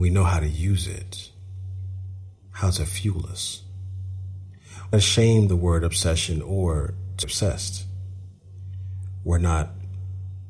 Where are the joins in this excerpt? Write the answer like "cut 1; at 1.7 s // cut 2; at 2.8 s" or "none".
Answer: cut 1; at 4.9 s // cut 2; at 5.5 s // cut 3; at 7.2 s